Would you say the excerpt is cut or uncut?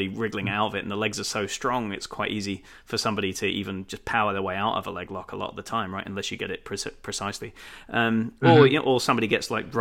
uncut